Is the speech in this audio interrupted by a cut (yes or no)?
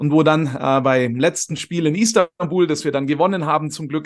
no